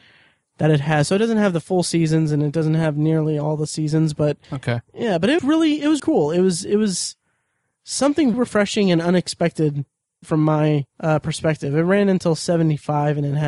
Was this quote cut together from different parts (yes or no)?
yes